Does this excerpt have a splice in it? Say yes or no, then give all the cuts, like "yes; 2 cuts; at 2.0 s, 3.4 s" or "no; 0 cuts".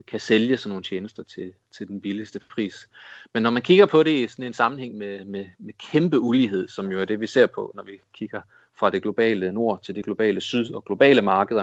no; 0 cuts